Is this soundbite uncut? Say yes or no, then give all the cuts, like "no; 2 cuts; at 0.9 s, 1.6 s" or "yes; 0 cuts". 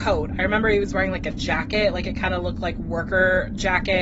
yes; 0 cuts